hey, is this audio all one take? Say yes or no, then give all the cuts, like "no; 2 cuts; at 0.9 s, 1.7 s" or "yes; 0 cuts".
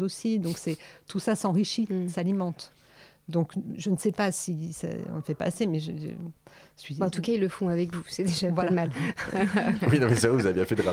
yes; 0 cuts